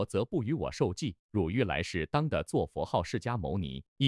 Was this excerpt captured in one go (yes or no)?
no